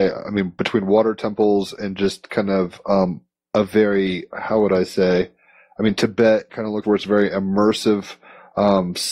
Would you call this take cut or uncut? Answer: cut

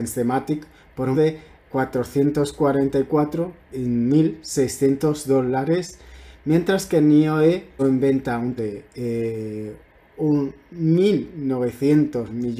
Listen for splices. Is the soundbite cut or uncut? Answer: cut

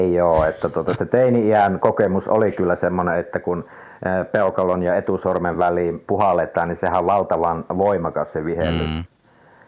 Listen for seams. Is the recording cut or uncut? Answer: uncut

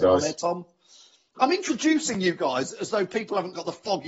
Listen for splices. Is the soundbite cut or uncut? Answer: uncut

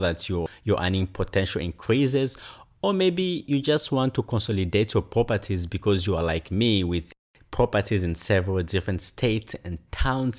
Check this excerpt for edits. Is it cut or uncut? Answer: uncut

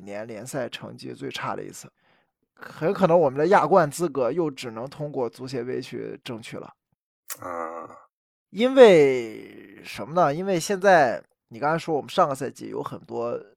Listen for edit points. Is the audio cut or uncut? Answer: uncut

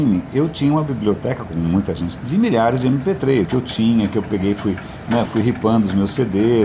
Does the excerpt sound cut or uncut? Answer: cut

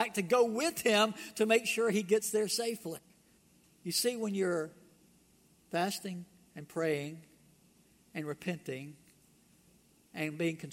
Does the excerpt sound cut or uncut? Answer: cut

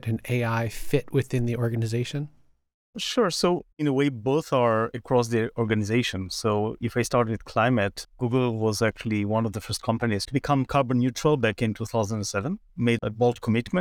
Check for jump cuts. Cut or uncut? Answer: cut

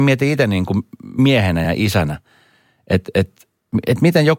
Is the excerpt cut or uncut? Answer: uncut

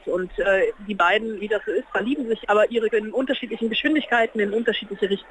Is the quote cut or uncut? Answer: cut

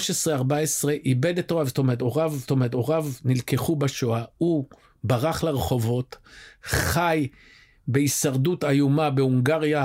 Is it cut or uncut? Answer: cut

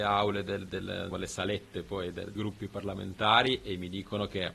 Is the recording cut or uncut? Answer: cut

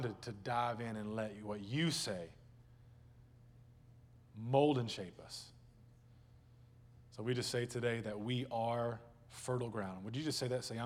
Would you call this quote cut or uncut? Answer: uncut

